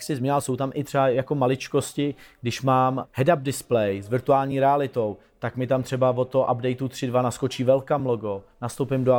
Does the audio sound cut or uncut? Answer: uncut